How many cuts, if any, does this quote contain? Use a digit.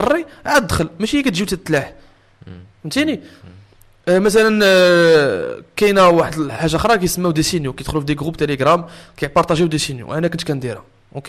0